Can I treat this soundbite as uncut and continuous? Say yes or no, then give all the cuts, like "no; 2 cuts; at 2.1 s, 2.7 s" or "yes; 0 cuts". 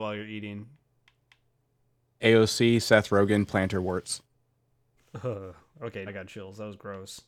no; 1 cut; at 6.1 s